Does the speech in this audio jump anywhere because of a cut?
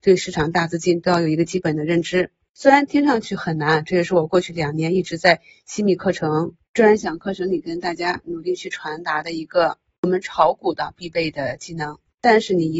no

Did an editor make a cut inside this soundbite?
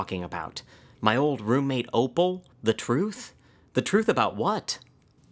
yes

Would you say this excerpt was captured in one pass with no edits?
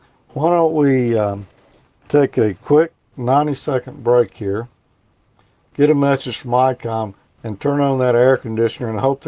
yes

